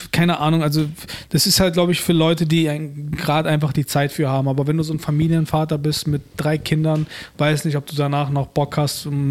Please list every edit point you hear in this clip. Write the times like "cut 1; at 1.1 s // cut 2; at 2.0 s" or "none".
none